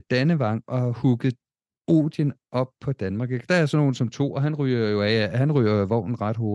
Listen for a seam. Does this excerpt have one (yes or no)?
no